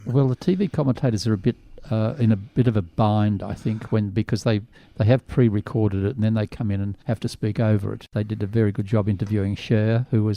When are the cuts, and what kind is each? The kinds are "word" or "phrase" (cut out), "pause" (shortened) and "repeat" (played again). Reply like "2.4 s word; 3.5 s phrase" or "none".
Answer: none

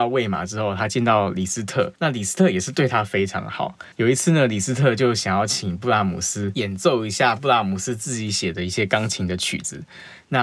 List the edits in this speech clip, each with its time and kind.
2.0 s pause; 3.9 s pause

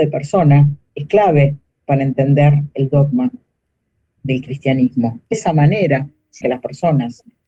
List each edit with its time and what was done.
5.3 s word; 6.4 s word

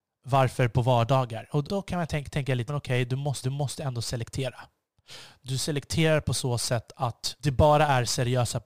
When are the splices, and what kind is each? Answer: 1.7 s phrase; 2.7 s phrase; 3.4 s repeat; 7.4 s pause

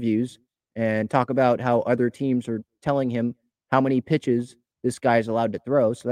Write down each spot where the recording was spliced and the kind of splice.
none

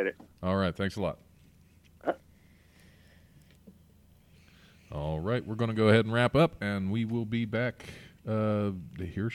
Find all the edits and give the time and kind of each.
none

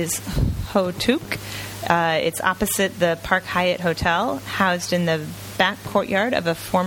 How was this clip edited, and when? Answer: none

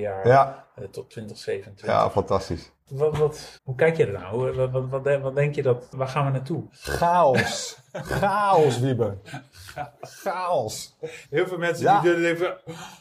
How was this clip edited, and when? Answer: 3.6 s pause; 11.2 s pause

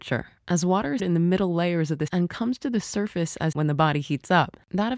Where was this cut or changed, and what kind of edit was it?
1.0 s word; 2.1 s word; 3.5 s word

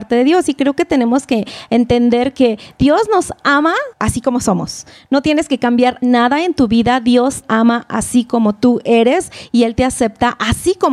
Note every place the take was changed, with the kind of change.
3.9 s pause; 6.0 s word; 7.4 s word

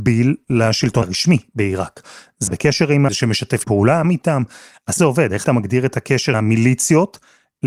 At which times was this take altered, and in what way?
1.0 s word; 2.5 s word; 3.1 s word; 3.6 s word; 4.0 s word; 5.0 s word; 5.4 s word; 6.3 s word

